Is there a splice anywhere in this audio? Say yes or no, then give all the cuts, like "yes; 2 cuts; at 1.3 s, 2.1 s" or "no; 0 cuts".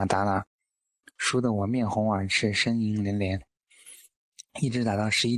yes; 1 cut; at 4.5 s